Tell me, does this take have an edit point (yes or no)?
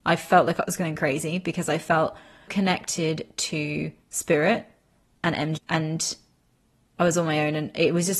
yes